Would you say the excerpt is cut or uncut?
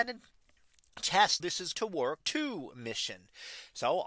cut